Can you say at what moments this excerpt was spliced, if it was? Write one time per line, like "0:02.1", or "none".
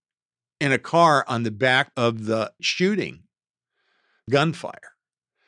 0:01.9
0:02.6
0:04.3